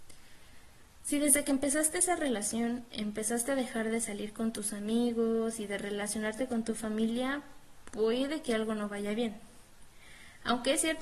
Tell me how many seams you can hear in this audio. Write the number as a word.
zero